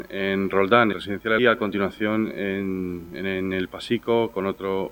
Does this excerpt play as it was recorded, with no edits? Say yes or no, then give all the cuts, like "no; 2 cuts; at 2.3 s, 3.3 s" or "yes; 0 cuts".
no; 2 cuts; at 0.9 s, 1.4 s